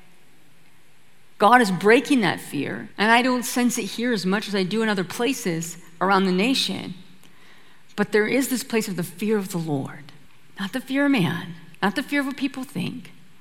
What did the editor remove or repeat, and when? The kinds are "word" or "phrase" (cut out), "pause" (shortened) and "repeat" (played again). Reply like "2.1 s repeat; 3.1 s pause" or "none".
2.9 s pause; 10.3 s pause; 11.7 s pause